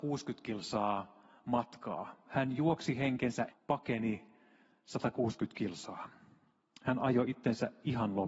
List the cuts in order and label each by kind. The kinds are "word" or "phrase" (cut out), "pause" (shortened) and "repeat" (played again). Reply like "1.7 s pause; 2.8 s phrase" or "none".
3.5 s word